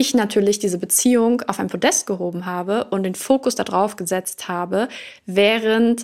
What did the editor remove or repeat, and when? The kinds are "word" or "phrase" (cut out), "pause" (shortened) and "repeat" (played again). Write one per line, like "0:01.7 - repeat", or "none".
none